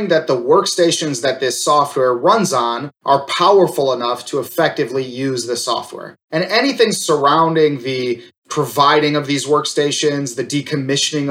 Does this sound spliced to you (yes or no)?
no